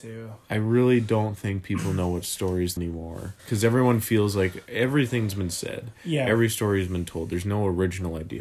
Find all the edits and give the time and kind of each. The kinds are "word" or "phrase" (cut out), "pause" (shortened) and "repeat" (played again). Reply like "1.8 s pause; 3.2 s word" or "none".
2.8 s phrase; 3.4 s pause